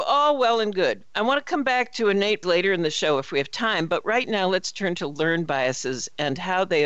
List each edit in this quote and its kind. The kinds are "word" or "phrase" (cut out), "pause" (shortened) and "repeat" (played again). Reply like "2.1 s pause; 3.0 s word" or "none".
2.4 s word